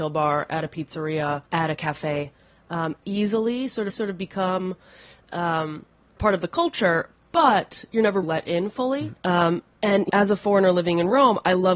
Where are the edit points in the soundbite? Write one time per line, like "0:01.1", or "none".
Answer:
0:01.5
0:03.0
0:03.9
0:06.2
0:08.2
0:09.2
0:09.7
0:10.1